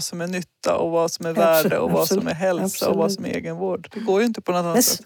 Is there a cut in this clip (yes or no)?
no